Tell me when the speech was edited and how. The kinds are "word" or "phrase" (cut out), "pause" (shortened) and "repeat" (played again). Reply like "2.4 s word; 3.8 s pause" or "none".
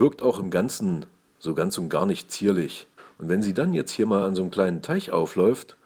none